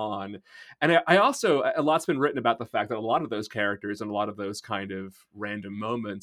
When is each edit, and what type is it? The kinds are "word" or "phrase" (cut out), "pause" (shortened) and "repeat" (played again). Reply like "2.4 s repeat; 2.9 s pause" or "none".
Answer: none